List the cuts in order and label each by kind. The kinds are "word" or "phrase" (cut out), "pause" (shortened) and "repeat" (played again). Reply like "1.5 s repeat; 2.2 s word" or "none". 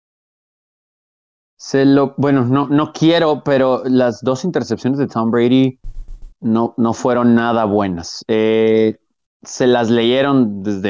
6.3 s pause